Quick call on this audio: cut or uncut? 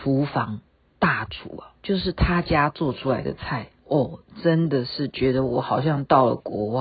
cut